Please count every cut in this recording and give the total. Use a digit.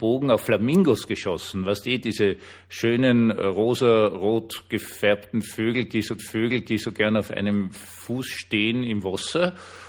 1